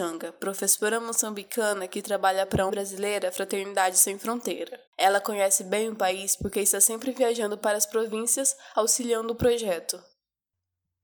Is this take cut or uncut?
cut